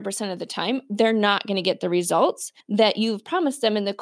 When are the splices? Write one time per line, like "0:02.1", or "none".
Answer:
0:02.6